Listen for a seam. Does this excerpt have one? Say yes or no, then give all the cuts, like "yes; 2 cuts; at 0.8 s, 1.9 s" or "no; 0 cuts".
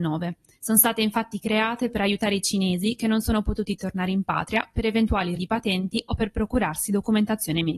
yes; 1 cut; at 5.4 s